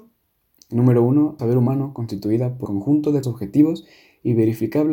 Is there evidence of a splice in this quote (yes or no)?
yes